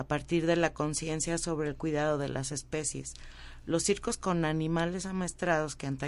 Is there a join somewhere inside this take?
no; 0 cuts

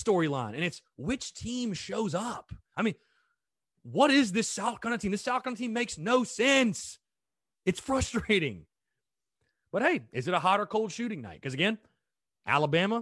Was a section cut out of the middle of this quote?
no; 0 cuts

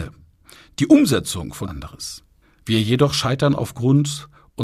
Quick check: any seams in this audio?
yes; 2 cuts; at 1.6 s, 2.4 s

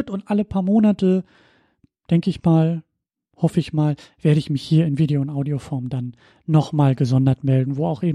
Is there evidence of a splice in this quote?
no; 0 cuts

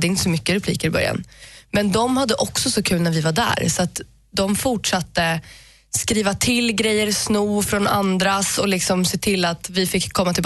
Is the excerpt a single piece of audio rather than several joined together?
yes; 0 cuts

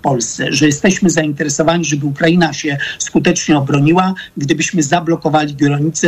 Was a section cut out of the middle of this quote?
no; 0 cuts

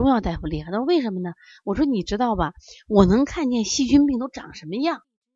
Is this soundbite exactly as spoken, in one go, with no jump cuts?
yes; 0 cuts

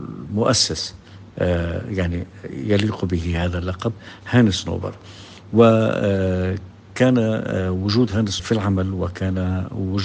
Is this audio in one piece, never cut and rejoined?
no; 1 cut; at 8.4 s

